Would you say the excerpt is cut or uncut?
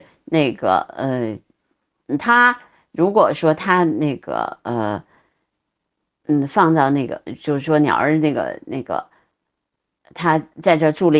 uncut